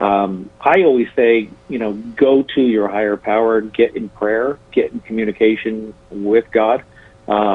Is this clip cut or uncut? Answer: uncut